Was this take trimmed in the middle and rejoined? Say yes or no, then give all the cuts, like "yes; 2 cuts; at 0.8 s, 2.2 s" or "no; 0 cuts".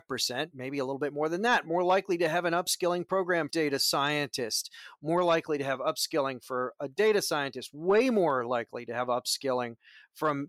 yes; 1 cut; at 3.5 s